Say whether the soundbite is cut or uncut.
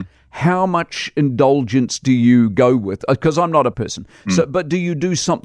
cut